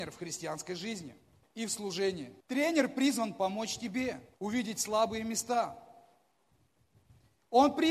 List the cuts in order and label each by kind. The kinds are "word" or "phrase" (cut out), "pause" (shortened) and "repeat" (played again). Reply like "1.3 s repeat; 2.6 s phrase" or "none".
1.4 s pause; 2.4 s pause; 4.3 s pause